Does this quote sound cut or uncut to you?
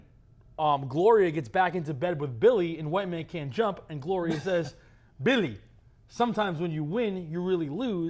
uncut